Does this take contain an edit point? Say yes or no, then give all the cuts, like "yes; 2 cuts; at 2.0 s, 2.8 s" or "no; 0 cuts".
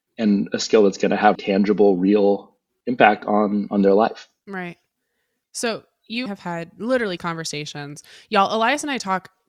yes; 4 cuts; at 1.3 s, 4.4 s, 6.3 s, 7.2 s